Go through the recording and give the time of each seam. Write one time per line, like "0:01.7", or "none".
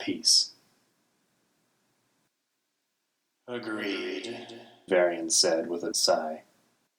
0:04.9
0:05.9